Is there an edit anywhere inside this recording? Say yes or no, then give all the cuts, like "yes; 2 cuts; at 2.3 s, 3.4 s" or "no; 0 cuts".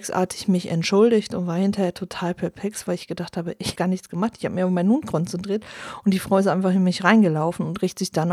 yes; 1 cut; at 3.8 s